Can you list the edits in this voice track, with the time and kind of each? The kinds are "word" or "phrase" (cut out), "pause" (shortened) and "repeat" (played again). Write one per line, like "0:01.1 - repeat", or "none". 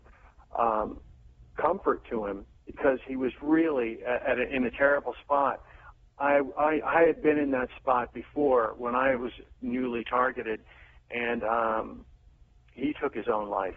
none